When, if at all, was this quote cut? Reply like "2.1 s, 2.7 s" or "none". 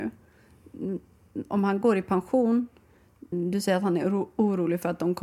3.3 s

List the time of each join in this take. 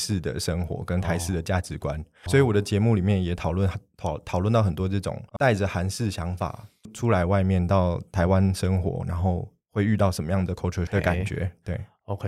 2.3 s, 5.4 s, 10.9 s

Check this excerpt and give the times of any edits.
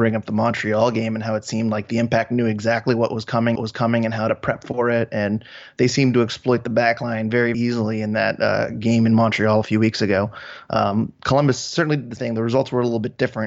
3.6 s, 7.5 s, 12.2 s

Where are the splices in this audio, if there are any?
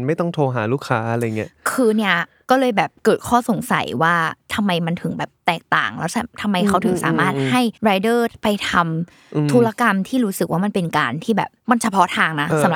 7.8 s, 11.6 s

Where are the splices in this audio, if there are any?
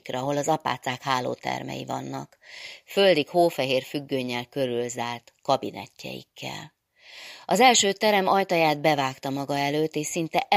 none

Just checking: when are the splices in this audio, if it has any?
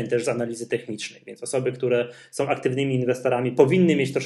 none

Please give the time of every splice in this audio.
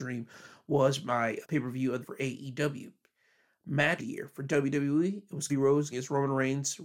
1.4 s, 2.0 s, 4.0 s, 5.5 s, 5.9 s

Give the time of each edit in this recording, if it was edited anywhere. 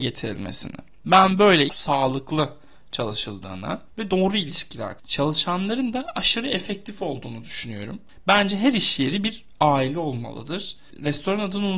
1.7 s, 5.0 s

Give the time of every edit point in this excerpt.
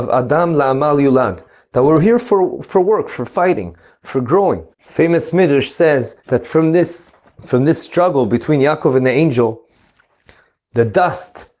4.7 s, 6.2 s, 7.2 s

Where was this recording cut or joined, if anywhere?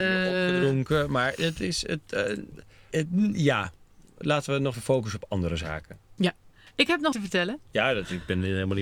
2.9 s, 4.7 s, 7.1 s

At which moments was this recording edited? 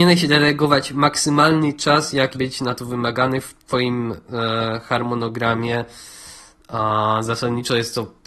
2.3 s

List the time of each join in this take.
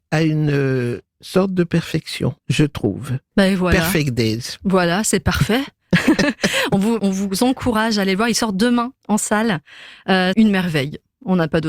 2.4 s, 7.0 s, 9.0 s, 10.3 s

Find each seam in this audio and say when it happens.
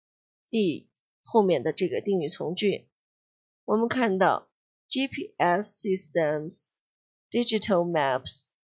none

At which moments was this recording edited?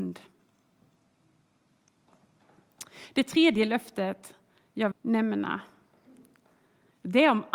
4.9 s

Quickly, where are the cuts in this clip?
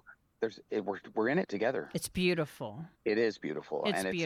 2.9 s

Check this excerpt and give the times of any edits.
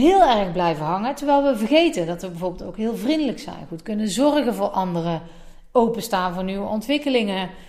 none

